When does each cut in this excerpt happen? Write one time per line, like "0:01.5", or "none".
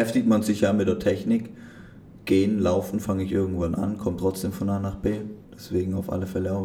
0:05.4